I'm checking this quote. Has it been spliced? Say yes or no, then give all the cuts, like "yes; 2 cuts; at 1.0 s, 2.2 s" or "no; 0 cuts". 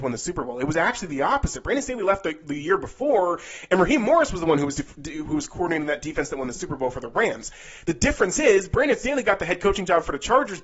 no; 0 cuts